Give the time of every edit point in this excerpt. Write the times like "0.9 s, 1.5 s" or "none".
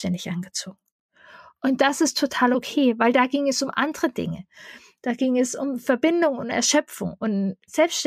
none

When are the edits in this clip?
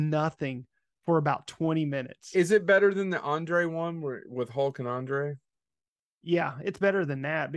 none

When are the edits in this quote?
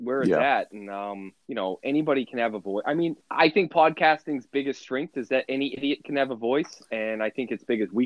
1.4 s, 3.2 s

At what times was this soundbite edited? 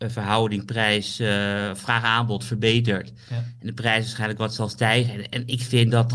none

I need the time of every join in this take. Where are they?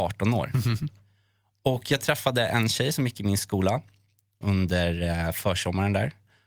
4.4 s

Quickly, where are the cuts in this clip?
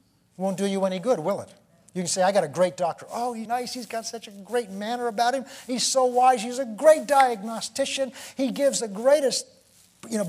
3.5 s

